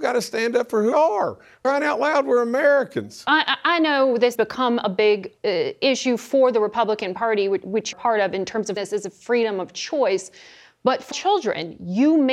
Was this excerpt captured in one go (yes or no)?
no